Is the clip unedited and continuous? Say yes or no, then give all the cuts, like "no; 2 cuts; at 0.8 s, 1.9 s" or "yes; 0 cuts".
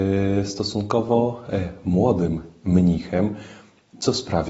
yes; 0 cuts